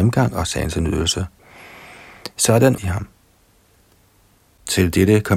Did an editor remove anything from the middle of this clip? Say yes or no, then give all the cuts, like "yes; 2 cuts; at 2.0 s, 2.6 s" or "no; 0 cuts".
yes; 1 cut; at 2.8 s